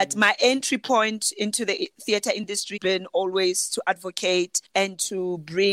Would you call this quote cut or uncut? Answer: cut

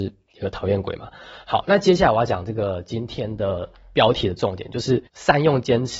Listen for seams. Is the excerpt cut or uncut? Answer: cut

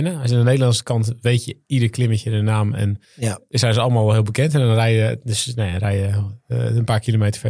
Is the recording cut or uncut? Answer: cut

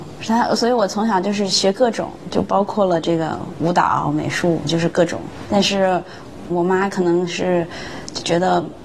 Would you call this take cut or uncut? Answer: cut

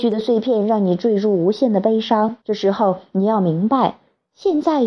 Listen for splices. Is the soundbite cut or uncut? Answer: cut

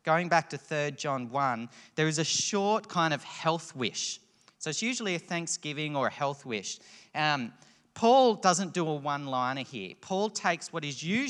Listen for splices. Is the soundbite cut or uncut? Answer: uncut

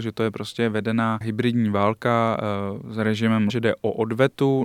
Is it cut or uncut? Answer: cut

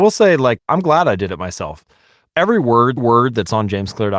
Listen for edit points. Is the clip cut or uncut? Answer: cut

